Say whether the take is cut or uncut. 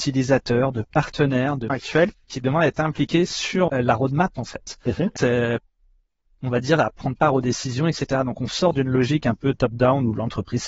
cut